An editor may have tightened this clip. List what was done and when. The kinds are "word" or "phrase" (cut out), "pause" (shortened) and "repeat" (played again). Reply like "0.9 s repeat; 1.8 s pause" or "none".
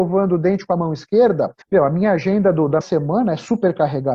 1.6 s pause; 2.8 s word

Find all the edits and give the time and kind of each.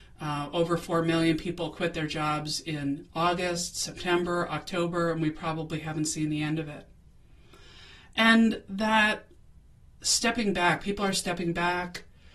none

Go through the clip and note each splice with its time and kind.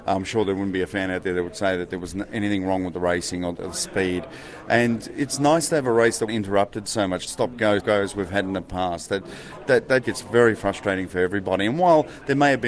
6.3 s word; 7.8 s word; 9.7 s word; 10.0 s word

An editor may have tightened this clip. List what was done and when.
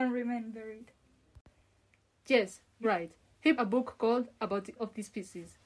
2.8 s word; 3.6 s word; 4.8 s word

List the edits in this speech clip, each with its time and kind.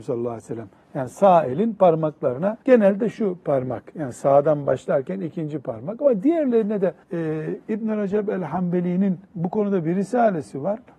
2.6 s pause; 7.0 s pause; 9.2 s pause

